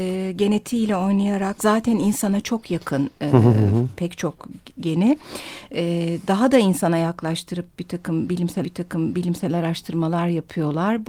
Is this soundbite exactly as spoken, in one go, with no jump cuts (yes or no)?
no